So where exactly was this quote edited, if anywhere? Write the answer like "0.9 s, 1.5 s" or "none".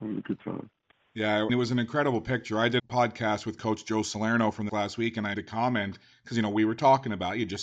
1.5 s, 2.8 s, 4.7 s, 5.3 s